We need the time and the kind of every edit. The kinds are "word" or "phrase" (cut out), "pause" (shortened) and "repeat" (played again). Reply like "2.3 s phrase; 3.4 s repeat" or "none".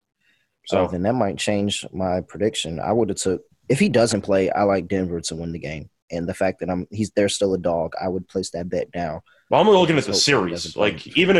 none